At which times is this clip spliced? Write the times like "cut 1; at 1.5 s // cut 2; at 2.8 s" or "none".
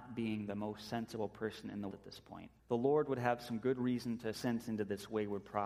cut 1; at 1.9 s // cut 2; at 2.6 s // cut 3; at 4.3 s